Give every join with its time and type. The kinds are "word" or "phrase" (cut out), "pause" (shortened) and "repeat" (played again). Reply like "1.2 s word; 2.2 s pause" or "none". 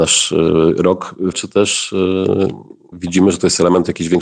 1.3 s word; 2.9 s word